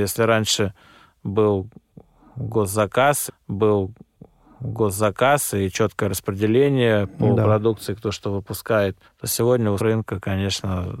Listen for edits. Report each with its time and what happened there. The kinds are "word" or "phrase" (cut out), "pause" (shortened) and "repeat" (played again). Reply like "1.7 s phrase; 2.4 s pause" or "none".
3.3 s repeat; 9.0 s pause; 9.8 s word